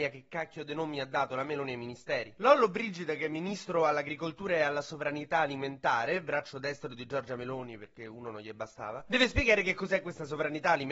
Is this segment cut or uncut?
uncut